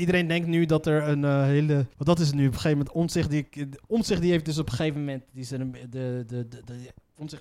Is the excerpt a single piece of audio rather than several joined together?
no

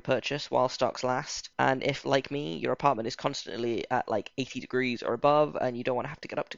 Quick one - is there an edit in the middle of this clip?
yes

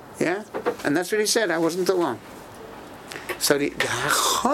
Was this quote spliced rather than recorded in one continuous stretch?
no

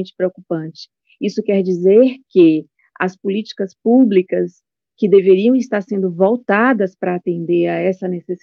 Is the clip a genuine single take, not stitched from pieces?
yes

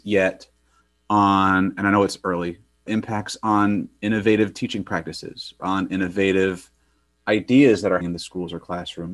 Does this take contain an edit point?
yes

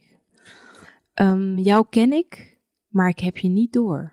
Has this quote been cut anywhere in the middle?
no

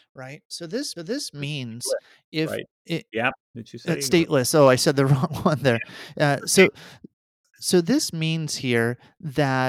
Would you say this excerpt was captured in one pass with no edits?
no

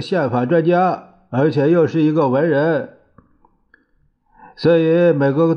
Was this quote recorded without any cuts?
yes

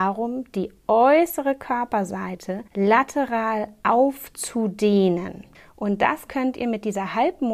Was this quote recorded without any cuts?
no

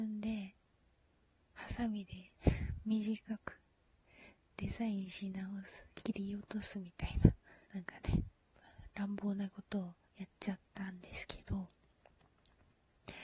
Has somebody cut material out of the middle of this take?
yes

